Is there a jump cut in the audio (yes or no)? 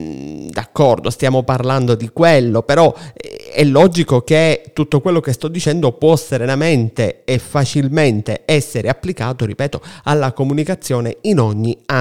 no